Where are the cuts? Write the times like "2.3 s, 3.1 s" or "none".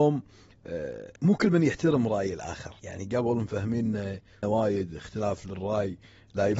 1.2 s, 2.8 s, 4.4 s